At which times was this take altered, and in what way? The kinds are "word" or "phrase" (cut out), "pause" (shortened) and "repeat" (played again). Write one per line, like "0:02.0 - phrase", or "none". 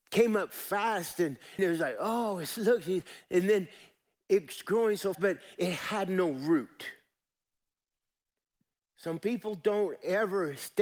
0:01.6 - phrase
0:05.1 - word